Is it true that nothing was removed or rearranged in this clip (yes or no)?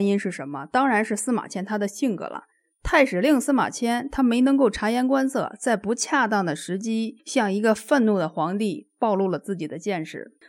no